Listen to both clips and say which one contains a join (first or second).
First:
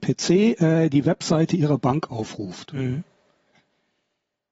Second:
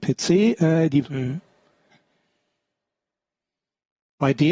second